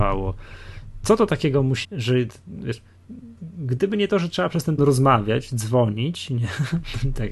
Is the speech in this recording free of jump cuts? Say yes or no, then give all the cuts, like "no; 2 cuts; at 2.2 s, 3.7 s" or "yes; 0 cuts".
no; 3 cuts; at 1.8 s, 3.4 s, 4.8 s